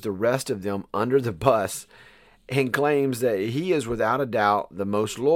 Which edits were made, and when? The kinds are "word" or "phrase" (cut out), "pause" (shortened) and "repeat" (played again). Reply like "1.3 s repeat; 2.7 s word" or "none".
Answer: none